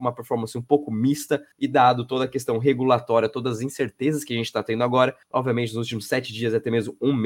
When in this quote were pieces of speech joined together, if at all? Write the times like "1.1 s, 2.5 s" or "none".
1.5 s, 5.2 s